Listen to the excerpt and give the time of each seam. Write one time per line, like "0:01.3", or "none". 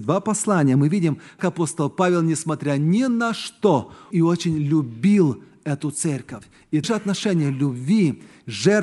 0:01.4
0:04.1
0:06.8